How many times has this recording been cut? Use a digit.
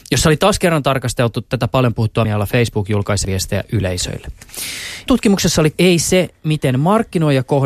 4